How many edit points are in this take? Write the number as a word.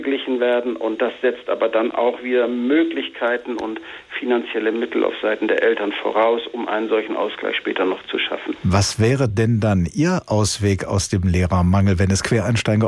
zero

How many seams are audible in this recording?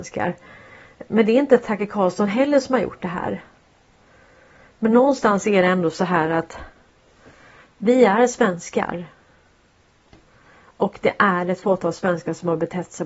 zero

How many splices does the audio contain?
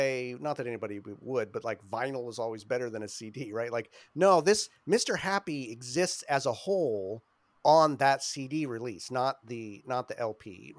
zero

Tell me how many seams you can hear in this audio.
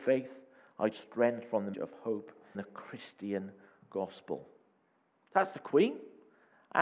three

